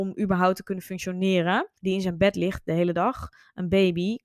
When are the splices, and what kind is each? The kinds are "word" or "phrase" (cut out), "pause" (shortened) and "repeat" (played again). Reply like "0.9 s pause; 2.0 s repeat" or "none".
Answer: 1.8 s pause